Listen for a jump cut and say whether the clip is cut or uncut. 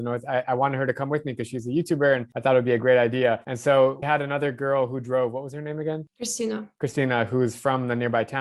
cut